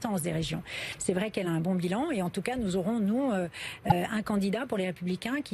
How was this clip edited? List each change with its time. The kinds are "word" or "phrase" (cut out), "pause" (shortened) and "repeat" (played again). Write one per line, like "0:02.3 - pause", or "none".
none